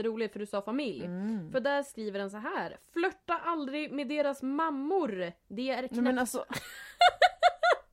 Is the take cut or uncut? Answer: uncut